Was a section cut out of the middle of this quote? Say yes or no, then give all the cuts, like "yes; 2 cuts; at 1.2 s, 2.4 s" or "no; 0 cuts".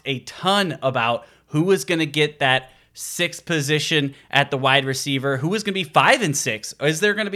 no; 0 cuts